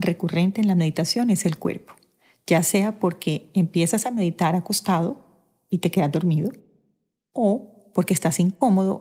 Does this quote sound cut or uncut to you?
uncut